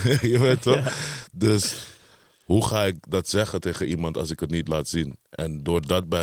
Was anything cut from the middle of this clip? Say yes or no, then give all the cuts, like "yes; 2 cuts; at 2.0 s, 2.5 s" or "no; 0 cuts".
no; 0 cuts